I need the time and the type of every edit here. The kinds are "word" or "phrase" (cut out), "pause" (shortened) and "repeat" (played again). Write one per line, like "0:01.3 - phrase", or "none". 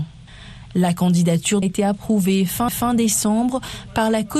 0:01.6 - phrase
0:02.7 - repeat